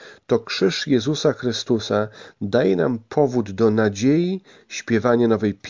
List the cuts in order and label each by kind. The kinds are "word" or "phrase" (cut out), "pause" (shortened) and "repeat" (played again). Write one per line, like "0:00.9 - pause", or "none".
none